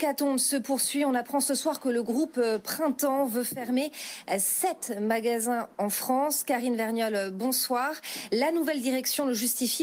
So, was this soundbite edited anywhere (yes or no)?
no